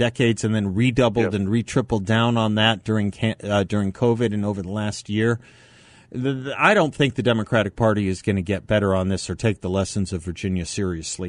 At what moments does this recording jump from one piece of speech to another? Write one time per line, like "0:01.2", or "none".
none